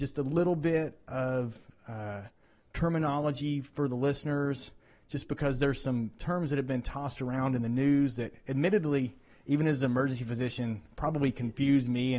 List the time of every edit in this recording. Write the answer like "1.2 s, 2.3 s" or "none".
none